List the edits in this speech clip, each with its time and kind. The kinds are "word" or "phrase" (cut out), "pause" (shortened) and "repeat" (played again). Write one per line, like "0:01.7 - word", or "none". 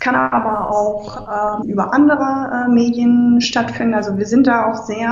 0:01.6 - word